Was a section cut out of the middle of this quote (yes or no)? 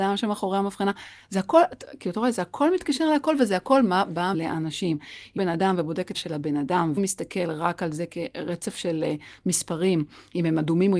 yes